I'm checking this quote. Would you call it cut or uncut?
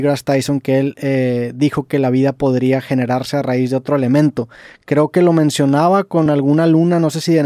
uncut